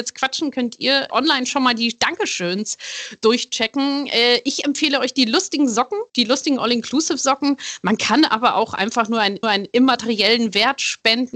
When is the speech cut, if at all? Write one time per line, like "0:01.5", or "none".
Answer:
0:01.1
0:06.1
0:09.4